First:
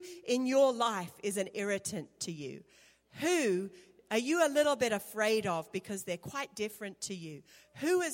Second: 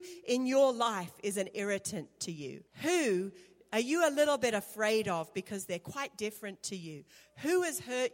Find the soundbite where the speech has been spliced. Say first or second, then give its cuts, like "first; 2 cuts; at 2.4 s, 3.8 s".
second; 1 cut; at 2.7 s